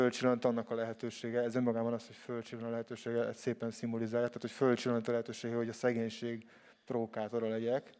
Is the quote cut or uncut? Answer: uncut